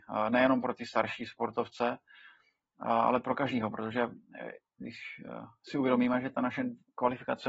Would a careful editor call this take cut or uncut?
uncut